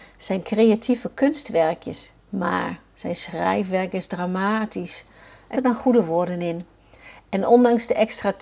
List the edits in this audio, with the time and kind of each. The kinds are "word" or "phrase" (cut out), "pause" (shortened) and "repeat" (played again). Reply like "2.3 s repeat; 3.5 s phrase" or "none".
2.2 s pause; 5.5 s phrase